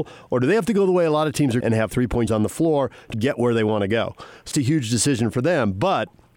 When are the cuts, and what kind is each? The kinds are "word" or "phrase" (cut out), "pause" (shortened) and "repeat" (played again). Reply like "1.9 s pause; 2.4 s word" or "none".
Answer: 1.6 s word; 1.9 s word; 2.3 s word; 3.1 s word; 4.5 s word